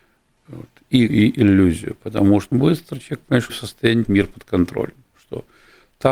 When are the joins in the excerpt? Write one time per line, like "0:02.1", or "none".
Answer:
0:01.1
0:02.5
0:03.5
0:04.0